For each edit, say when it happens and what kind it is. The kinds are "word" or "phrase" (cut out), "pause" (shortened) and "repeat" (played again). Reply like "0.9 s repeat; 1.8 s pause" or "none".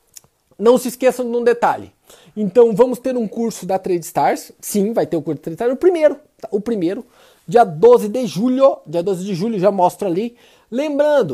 none